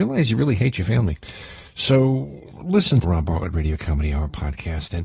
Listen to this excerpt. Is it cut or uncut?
cut